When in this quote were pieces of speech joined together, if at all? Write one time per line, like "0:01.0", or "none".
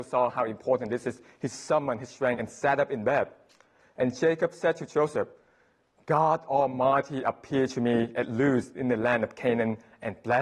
none